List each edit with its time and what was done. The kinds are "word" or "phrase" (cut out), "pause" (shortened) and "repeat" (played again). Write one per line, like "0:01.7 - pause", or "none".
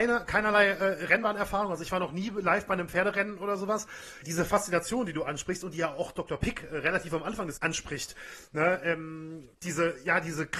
0:04.2 - word
0:07.6 - word
0:09.5 - pause